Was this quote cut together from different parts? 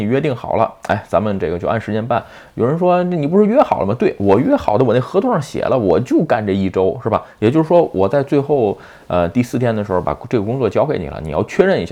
no; 0 cuts

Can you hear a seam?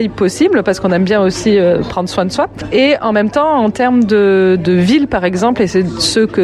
no; 0 cuts

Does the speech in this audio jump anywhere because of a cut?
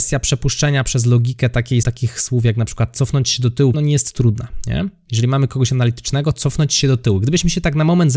yes; 2 cuts; at 1.8 s, 3.7 s

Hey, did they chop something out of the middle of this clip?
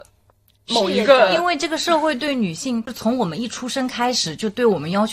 no; 0 cuts

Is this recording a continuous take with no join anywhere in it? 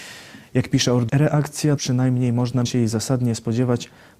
no; 3 cuts; at 1.1 s, 1.8 s, 2.7 s

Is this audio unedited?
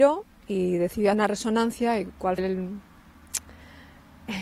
no; 2 cuts; at 1.1 s, 2.4 s

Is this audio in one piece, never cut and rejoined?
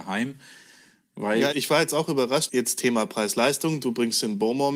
no; 2 cuts; at 1.5 s, 2.5 s

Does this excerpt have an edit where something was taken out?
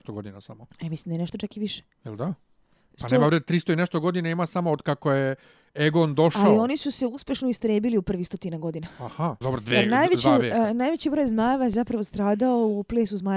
yes; 1 cut; at 9.4 s

